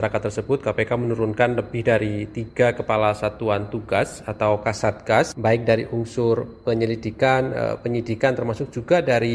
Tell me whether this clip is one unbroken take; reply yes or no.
yes